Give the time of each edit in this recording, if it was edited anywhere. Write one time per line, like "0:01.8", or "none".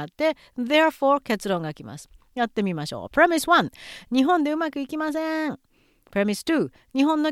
none